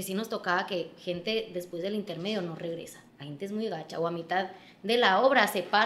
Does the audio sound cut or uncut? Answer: cut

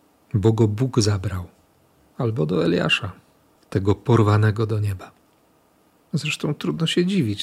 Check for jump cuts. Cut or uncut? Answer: uncut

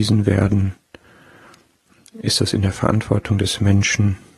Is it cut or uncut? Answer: uncut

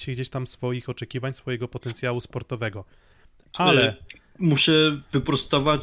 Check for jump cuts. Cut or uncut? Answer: uncut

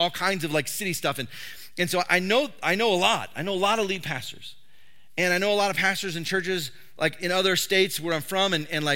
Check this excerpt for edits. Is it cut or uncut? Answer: uncut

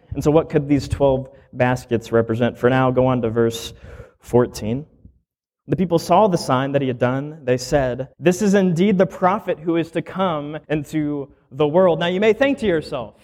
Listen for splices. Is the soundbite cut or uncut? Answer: cut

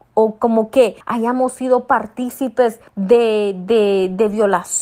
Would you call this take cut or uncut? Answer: cut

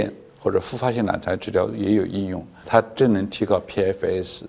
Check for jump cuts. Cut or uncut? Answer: cut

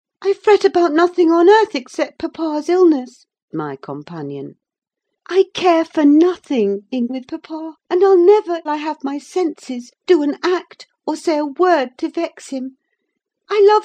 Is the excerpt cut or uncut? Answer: cut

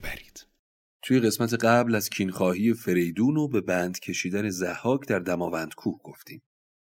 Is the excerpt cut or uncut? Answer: uncut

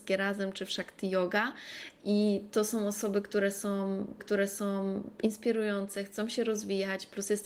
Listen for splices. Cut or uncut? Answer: cut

